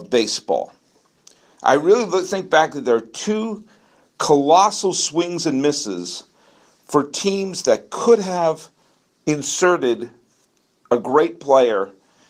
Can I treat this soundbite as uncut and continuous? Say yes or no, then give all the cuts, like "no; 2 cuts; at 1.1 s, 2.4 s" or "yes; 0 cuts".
yes; 0 cuts